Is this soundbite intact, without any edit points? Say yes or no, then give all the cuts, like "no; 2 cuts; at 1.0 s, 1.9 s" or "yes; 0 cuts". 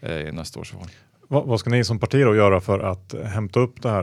yes; 0 cuts